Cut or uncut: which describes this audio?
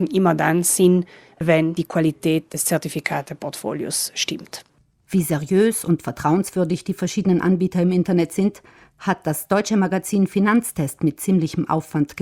uncut